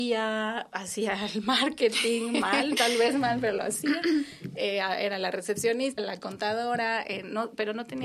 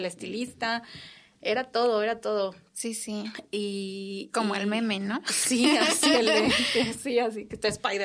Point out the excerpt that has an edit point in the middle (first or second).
first